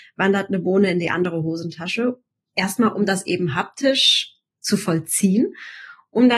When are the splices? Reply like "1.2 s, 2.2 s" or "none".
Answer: none